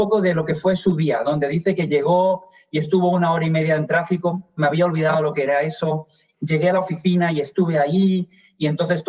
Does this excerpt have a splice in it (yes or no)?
no